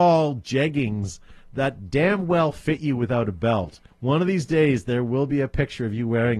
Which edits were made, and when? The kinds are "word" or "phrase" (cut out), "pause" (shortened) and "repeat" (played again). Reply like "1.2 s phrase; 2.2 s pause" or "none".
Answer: 3.9 s pause